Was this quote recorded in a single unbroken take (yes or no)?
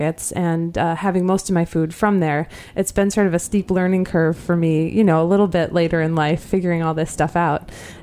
yes